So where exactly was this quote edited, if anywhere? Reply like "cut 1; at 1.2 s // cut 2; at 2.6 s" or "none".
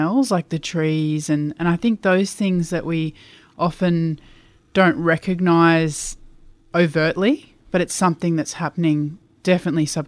none

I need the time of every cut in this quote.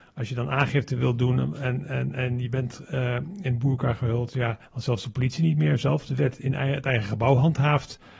cut 1; at 4.7 s

